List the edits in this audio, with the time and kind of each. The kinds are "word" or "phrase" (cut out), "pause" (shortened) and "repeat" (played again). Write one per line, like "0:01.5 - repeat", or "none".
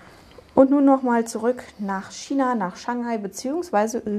none

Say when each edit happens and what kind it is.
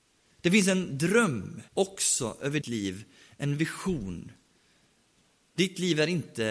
0:01.7 - pause
0:02.6 - word

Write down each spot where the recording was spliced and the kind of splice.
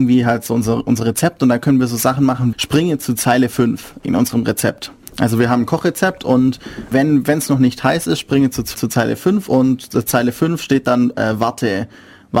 0:02.5 - word
0:05.0 - pause
0:06.9 - word
0:08.7 - word

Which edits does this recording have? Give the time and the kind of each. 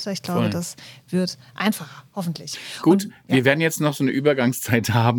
none

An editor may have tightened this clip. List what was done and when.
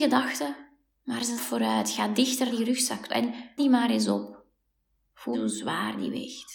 0:01.4 - word
0:02.5 - word
0:03.1 - word
0:03.6 - word
0:05.3 - word

